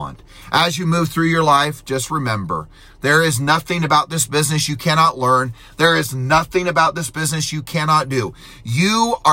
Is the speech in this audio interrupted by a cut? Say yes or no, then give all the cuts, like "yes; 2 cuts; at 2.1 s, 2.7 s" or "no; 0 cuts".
no; 0 cuts